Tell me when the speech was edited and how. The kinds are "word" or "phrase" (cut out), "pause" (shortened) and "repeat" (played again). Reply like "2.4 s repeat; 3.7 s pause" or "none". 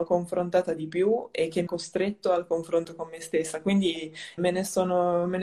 1.7 s word; 4.4 s word